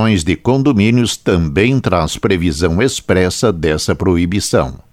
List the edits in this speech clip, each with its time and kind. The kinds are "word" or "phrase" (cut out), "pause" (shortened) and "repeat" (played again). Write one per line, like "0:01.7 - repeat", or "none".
none